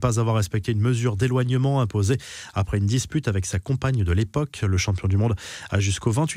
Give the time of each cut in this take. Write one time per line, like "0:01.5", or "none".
none